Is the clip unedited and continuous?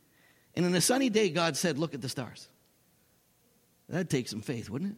yes; 0 cuts

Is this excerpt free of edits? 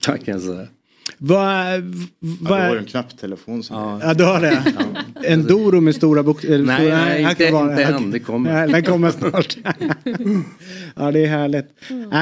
yes; 0 cuts

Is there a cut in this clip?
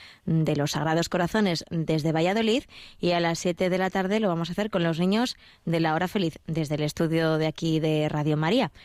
no; 0 cuts

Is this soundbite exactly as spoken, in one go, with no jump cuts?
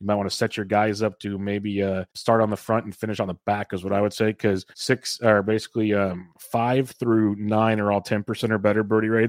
no; 3 cuts; at 2.1 s, 4.7 s, 6.3 s

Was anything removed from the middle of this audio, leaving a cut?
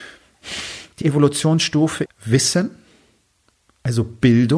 yes; 2 cuts; at 1.0 s, 2.1 s

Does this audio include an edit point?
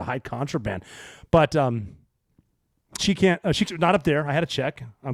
yes; 2 cuts; at 3.0 s, 3.7 s

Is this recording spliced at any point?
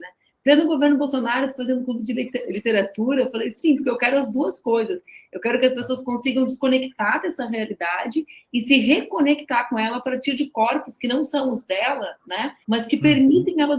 yes; 1 cut; at 12.6 s

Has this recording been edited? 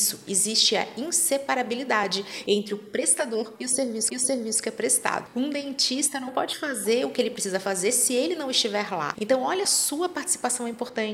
yes; 2 cuts; at 4.1 s, 9.6 s

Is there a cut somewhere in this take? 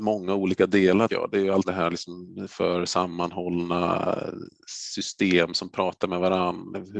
yes; 3 cuts; at 1.1 s, 1.6 s, 2.5 s

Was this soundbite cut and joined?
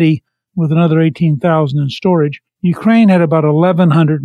yes; 1 cut; at 2.5 s

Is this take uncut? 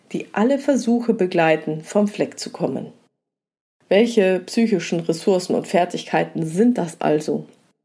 yes; 0 cuts

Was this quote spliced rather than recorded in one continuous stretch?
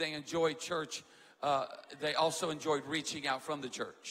no; 0 cuts

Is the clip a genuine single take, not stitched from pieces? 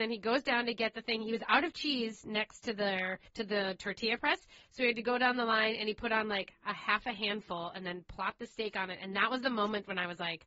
no; 1 cut; at 3.3 s

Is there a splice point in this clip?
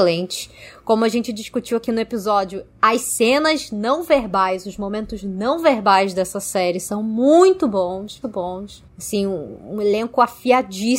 yes; 1 cut; at 8.2 s

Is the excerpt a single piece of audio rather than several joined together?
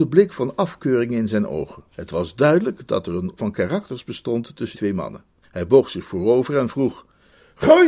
no; 4 cuts; at 1.9 s, 3.4 s, 4.7 s, 5.4 s

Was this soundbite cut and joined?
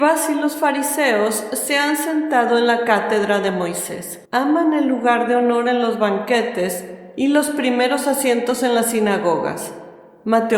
yes; 1 cut; at 4.2 s

